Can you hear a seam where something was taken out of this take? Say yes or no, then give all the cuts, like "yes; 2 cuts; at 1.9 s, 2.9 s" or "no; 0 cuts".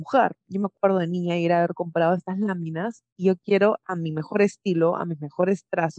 no; 0 cuts